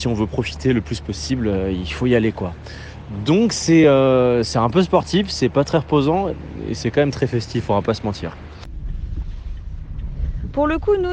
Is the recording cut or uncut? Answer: uncut